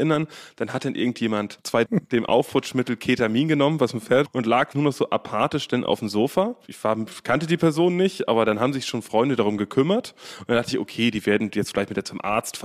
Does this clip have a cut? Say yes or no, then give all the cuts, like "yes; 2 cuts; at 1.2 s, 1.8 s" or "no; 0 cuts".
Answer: yes; 3 cuts; at 1.9 s, 4.3 s, 4.7 s